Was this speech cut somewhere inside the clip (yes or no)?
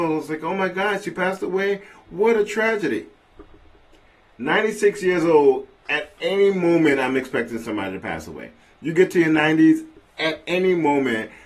no